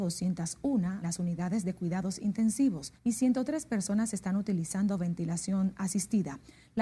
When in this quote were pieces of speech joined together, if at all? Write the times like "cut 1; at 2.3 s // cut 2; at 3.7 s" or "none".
cut 1; at 1.0 s // cut 2; at 3.0 s